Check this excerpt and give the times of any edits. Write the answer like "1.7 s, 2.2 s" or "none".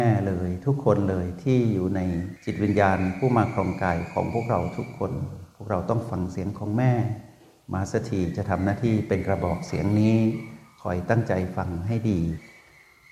none

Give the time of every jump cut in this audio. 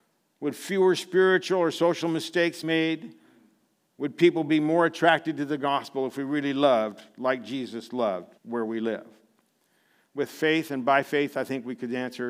2.6 s, 8.4 s

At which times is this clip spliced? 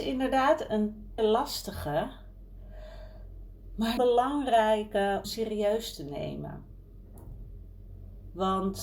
1.2 s, 4.0 s, 5.2 s

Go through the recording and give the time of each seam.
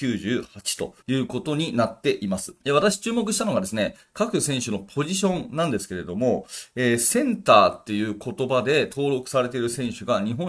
1.0 s, 2.6 s

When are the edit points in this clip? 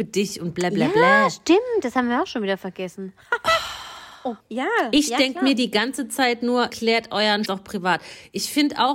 4.4 s, 6.7 s, 7.4 s

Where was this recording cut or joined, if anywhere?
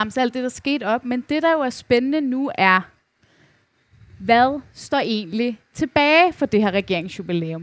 none

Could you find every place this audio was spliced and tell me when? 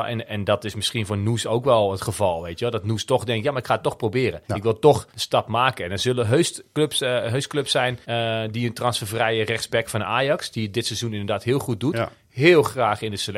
4.4 s, 5.1 s, 8.0 s

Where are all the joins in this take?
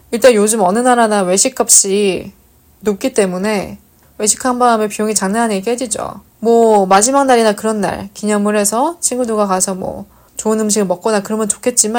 6.3 s

